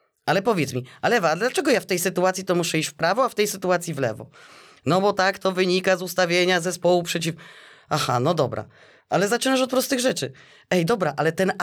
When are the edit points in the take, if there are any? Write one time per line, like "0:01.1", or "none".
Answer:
none